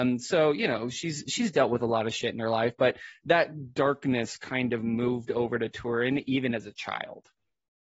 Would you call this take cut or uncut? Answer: uncut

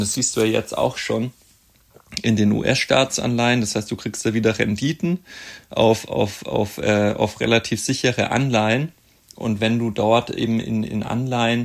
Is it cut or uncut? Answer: uncut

